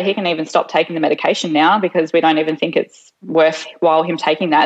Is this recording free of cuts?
no; 1 cut; at 3.1 s

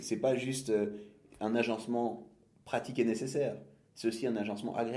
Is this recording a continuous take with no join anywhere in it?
yes; 0 cuts

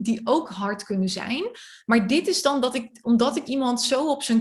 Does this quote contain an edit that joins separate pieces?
yes; 1 cut; at 3.5 s

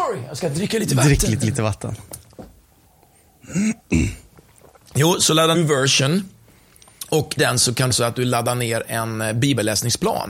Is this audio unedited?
no; 5 cuts; at 1.4 s, 3.8 s, 5.5 s, 7.4 s, 7.9 s

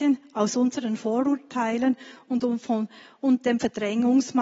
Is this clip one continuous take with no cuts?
yes; 0 cuts

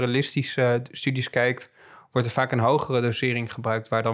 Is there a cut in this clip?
no; 0 cuts

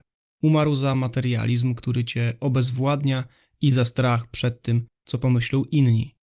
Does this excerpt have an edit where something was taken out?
no; 0 cuts

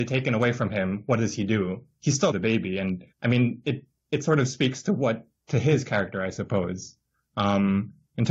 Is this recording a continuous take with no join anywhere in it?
no; 3 cuts; at 2.3 s, 3.1 s, 5.4 s

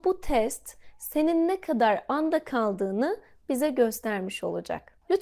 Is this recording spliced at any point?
no; 0 cuts

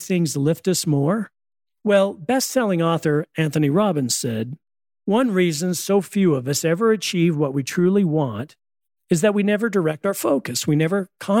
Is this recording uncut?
yes; 0 cuts

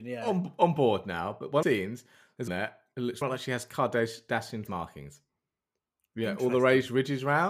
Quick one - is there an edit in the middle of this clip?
yes; 4 cuts; at 1.6 s, 2.5 s, 3.2 s, 4.7 s

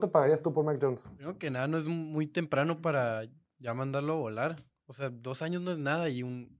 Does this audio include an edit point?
no; 0 cuts

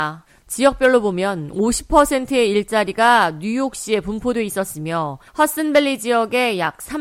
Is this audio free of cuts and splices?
no; 1 cut; at 5.3 s

